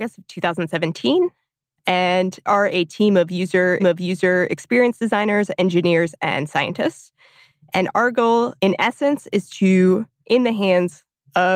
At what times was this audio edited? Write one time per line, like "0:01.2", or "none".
0:02.5
0:03.8
0:08.6
0:10.2